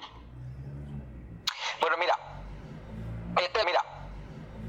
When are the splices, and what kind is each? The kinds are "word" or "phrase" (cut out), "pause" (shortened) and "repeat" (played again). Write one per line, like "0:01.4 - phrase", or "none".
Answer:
0:03.6 - repeat